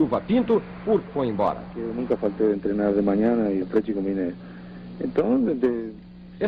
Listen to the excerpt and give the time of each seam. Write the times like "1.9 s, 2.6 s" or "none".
1.1 s, 3.6 s